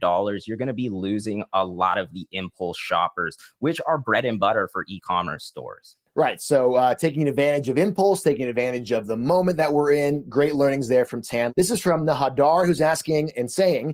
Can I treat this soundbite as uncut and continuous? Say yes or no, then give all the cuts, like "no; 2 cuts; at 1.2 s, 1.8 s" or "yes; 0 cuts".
yes; 0 cuts